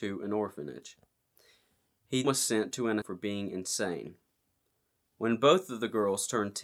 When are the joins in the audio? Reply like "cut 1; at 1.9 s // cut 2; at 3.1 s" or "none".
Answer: cut 1; at 2.2 s // cut 2; at 3.0 s